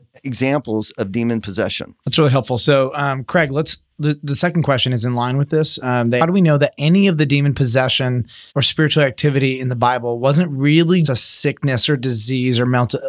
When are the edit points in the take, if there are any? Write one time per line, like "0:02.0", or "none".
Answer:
0:06.2
0:08.5
0:11.0